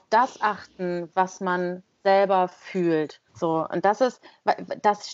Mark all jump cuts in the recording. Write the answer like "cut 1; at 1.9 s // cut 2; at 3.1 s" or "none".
cut 1; at 3.3 s